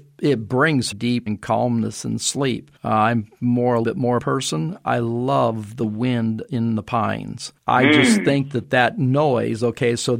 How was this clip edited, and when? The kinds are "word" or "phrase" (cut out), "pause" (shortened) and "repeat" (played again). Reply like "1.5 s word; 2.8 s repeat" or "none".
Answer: 0.9 s phrase; 1.3 s word; 2.8 s pause; 3.8 s word; 4.2 s phrase; 7.6 s pause